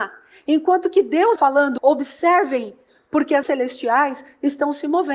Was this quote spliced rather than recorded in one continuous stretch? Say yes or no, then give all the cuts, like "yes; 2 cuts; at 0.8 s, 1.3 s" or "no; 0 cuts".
yes; 3 cuts; at 1.4 s, 1.8 s, 3.4 s